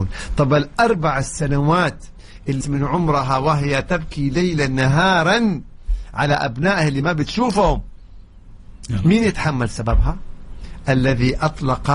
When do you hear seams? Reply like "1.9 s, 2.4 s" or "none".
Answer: 2.6 s